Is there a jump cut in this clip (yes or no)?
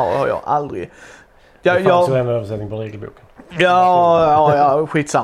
no